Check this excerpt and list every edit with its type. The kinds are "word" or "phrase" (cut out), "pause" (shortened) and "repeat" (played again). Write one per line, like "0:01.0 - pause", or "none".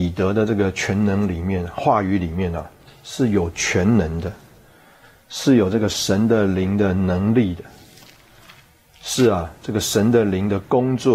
none